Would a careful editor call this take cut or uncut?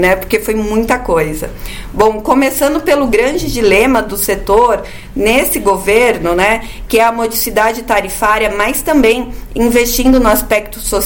uncut